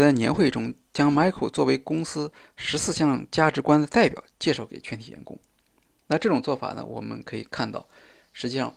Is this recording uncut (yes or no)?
yes